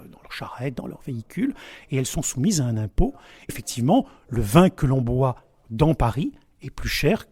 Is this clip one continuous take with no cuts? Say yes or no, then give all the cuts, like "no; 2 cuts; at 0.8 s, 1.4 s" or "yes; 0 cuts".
no; 1 cut; at 3.5 s